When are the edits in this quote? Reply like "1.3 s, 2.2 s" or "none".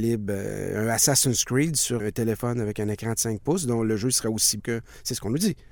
2.0 s, 4.6 s